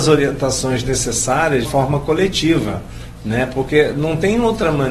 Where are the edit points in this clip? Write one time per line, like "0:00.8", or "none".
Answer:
0:01.6